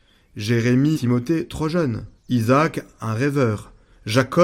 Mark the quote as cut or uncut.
cut